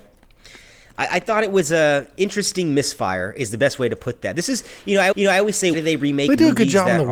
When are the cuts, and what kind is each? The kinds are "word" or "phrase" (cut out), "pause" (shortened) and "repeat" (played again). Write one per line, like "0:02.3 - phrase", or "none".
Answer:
0:05.1 - repeat
0:05.7 - word